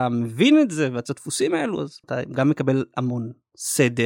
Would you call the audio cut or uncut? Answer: cut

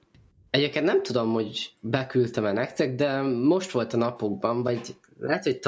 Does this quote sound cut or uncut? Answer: uncut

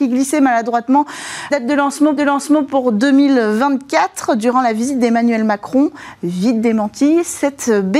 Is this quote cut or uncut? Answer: cut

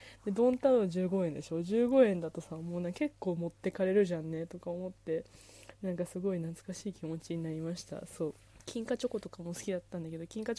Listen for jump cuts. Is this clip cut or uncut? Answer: cut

